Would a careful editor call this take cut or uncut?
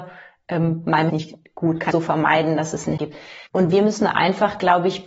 cut